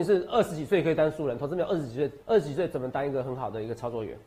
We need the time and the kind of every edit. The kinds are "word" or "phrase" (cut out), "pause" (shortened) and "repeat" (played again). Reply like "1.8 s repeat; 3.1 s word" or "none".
2.2 s pause